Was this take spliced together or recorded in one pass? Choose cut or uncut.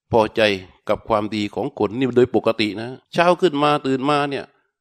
cut